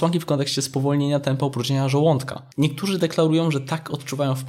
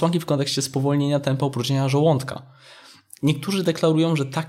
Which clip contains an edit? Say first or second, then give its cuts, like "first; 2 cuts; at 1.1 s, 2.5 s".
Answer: first; 1 cut; at 2.5 s